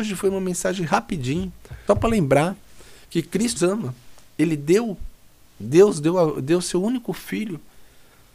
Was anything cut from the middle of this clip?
yes; 4 cuts; at 1.9 s, 3.0 s, 3.6 s, 5.4 s

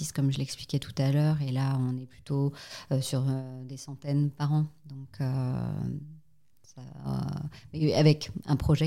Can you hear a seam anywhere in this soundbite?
no; 0 cuts

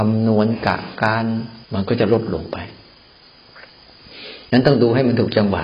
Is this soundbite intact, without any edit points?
no; 1 cut; at 1.6 s

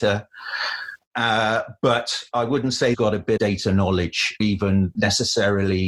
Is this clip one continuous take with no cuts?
no; 4 cuts; at 2.9 s, 3.4 s, 4.4 s, 4.9 s

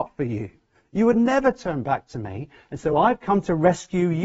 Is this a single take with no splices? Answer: yes; 0 cuts

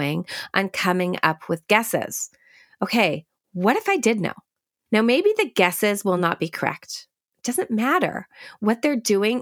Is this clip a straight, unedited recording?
yes; 0 cuts

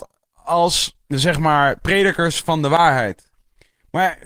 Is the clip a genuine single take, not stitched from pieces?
no; 1 cut; at 1.0 s

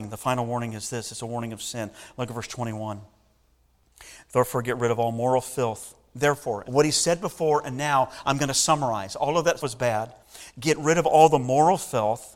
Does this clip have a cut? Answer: yes; 2 cuts; at 6.6 s, 9.6 s

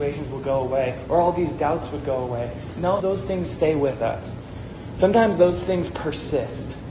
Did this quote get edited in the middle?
yes; 1 cut; at 3.0 s

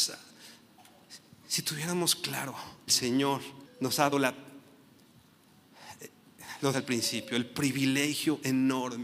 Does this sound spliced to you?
yes; 4 cuts; at 2.9 s, 3.7 s, 4.1 s, 6.7 s

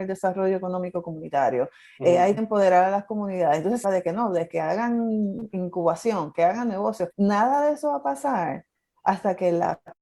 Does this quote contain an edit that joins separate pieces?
yes; 3 cuts; at 2.4 s, 3.8 s, 7.1 s

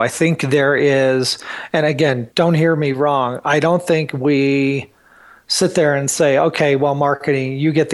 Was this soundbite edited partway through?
yes; 1 cut; at 2.3 s

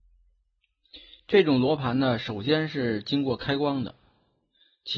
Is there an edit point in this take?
no; 0 cuts

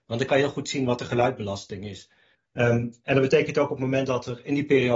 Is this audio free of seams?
yes; 0 cuts

